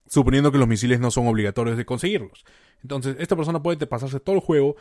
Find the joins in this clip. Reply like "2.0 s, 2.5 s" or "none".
none

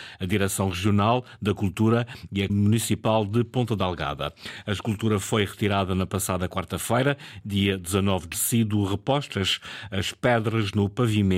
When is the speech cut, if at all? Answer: 2.5 s, 8.3 s

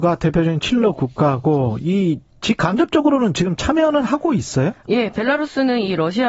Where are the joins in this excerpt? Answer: none

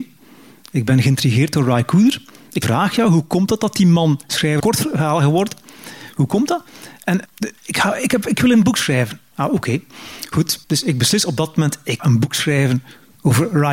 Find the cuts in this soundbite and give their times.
2.6 s, 4.6 s, 7.3 s, 7.6 s, 10.6 s, 12.0 s

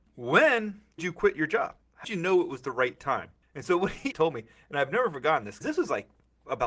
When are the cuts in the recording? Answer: 1.0 s, 2.0 s, 4.1 s, 5.6 s

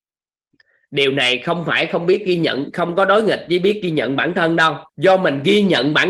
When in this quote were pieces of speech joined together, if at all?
4.9 s

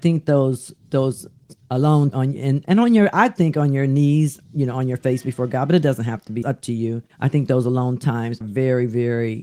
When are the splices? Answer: 2.1 s, 6.4 s, 7.1 s, 8.4 s

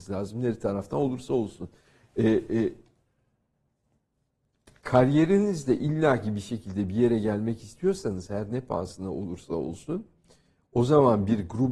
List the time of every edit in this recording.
none

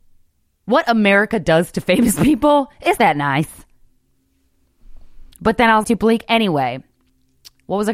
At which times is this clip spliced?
3.0 s, 5.3 s, 5.8 s

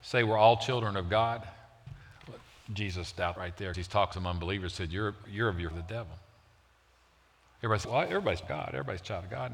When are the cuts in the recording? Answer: 3.4 s, 3.7 s, 4.1 s, 5.2 s, 5.7 s, 7.8 s, 8.4 s

